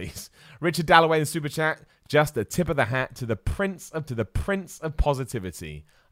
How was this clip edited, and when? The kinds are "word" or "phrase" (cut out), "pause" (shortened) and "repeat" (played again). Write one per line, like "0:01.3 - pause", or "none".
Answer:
0:04.1 - repeat

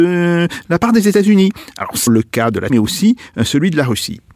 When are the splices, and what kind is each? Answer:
0:02.1 - word
0:02.7 - word

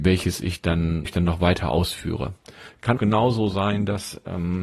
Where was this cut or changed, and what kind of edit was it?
0:01.0 - word
0:03.0 - word

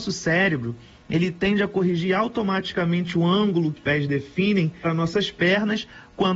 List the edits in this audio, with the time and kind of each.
0:03.8 - word
0:04.8 - word

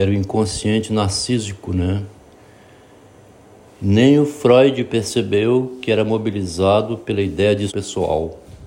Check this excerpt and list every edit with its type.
0:07.7 - word

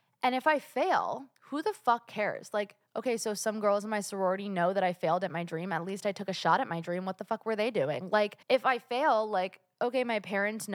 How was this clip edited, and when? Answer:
0:01.4 - pause
0:08.4 - pause

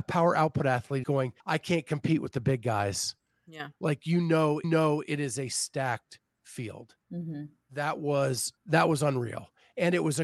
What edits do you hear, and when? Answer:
0:01.0 - word
0:01.4 - pause
0:04.6 - repeat
0:07.0 - pause
0:08.6 - pause

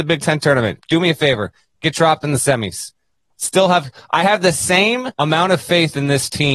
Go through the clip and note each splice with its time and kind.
0:05.1 - pause

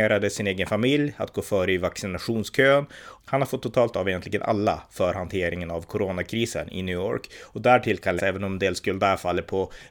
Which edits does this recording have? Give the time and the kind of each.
0:03.2 - word
0:03.9 - word
0:08.2 - word

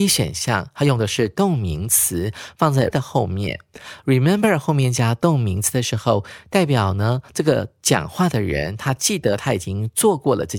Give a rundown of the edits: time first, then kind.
0:02.9 - word

